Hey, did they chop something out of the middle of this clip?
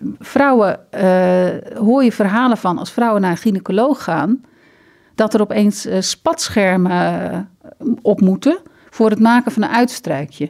no; 0 cuts

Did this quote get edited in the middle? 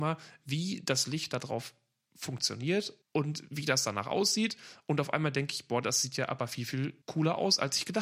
yes; 2 cuts; at 3.0 s, 7.0 s

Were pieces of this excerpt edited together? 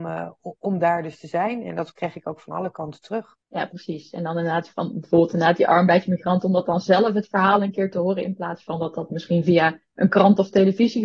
yes; 1 cut; at 3.4 s

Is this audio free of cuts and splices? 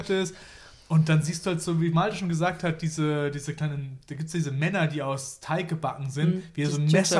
yes; 0 cuts

